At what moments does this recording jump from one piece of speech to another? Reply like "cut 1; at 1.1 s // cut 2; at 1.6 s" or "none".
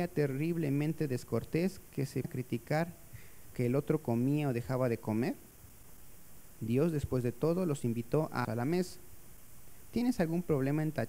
cut 1; at 2.2 s // cut 2; at 3.5 s // cut 3; at 8.4 s